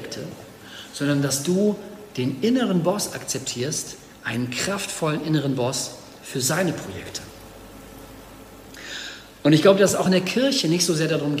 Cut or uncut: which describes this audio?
uncut